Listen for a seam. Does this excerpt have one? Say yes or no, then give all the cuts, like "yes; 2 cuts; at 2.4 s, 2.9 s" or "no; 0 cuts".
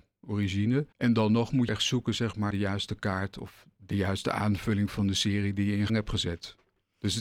yes; 4 cuts; at 0.9 s, 1.7 s, 2.5 s, 5.9 s